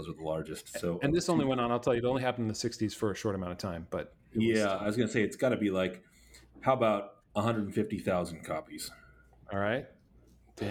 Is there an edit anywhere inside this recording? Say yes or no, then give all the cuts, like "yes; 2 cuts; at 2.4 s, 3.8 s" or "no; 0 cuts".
no; 0 cuts